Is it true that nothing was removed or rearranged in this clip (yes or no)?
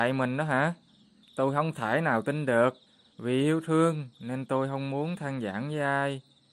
no